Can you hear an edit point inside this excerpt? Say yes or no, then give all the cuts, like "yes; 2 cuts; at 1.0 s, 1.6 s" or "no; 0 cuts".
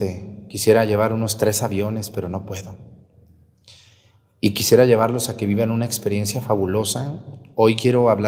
no; 0 cuts